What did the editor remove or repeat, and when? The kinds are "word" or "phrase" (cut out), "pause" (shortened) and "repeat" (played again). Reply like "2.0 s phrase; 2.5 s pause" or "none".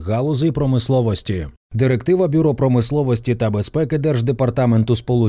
none